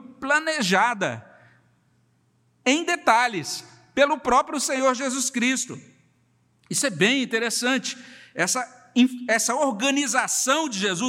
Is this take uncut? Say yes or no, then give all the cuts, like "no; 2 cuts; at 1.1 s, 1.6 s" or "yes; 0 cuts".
yes; 0 cuts